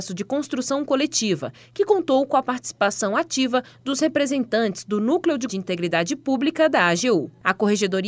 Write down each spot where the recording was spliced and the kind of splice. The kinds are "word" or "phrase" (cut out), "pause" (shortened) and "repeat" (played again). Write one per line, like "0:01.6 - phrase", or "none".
0:05.5 - word

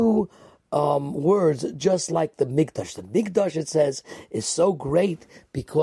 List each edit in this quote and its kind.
none

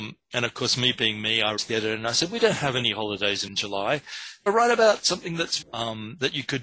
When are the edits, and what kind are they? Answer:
0:01.6 - word
0:03.5 - word
0:04.5 - word
0:05.6 - word

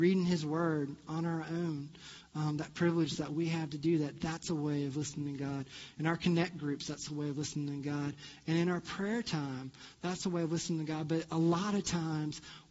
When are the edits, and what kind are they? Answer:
none

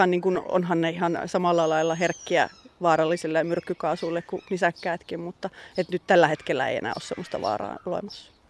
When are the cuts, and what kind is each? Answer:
none

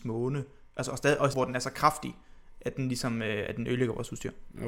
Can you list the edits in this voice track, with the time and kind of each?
0:01.3 - phrase

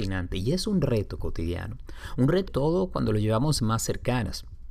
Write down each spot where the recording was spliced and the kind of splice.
0:02.5 - word
0:03.6 - phrase

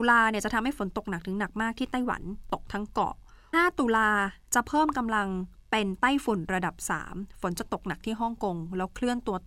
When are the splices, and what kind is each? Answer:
0:03.5 - phrase

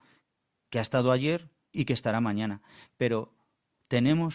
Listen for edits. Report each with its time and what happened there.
0:01.7 - phrase

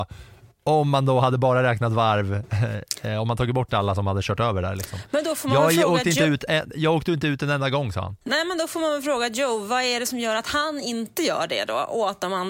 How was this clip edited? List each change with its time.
0:08.2 - pause

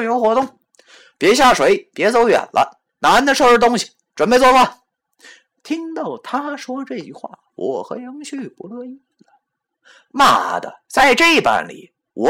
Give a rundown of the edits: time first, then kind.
0:02.9 - pause
0:10.8 - pause

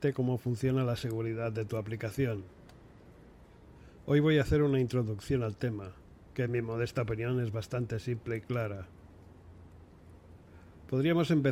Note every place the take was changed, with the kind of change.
none

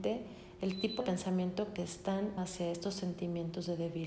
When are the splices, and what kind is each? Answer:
0:01.0 - word
0:01.8 - word
0:02.4 - word

